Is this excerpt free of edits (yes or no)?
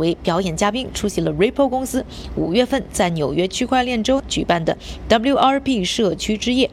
yes